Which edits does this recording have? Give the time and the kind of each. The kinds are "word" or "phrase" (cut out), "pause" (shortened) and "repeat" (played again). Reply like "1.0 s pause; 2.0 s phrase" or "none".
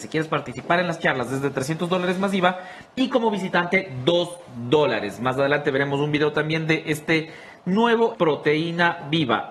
8.1 s word